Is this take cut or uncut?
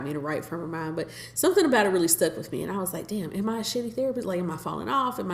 uncut